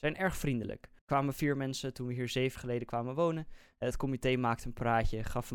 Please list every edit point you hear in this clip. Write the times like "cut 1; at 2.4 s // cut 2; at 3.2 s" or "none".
cut 1; at 1.0 s // cut 2; at 2.6 s